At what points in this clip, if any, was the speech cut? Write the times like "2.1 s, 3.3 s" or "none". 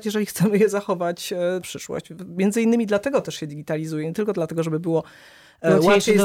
1.6 s